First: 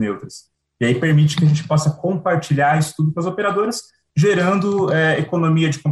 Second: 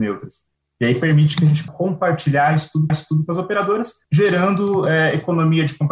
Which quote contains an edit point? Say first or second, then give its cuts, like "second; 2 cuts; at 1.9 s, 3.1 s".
second; 3 cuts; at 1.7 s, 2.9 s, 4.0 s